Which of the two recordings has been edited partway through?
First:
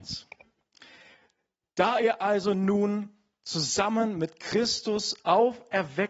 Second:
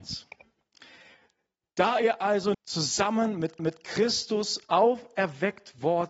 second; 2 cuts; at 2.5 s, 3.6 s

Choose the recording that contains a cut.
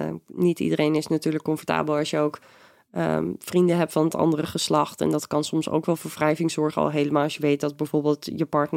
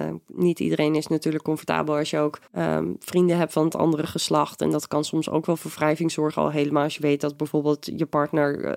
second; 1 cut; at 2.5 s

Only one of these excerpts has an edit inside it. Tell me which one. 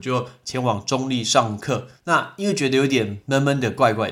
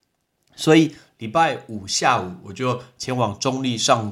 first; 1 cut; at 2.0 s

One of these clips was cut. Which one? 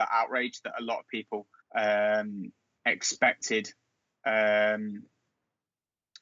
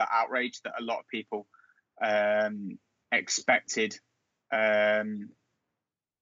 first; 1 cut; at 1.6 s

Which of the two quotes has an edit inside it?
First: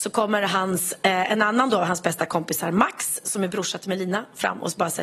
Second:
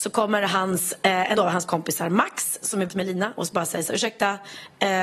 second; 4 cuts; at 1.4 s, 1.7 s, 2.9 s, 3.4 s

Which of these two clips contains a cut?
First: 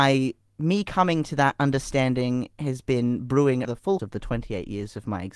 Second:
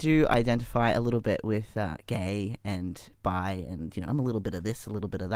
first; 2 cuts; at 3.6 s, 4.0 s

